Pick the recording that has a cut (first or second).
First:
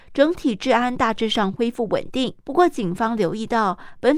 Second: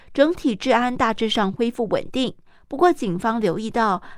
first